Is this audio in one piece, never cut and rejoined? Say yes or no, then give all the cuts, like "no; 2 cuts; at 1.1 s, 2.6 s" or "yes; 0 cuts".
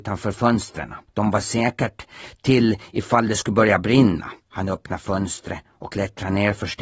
no; 2 cuts; at 1.1 s, 4.4 s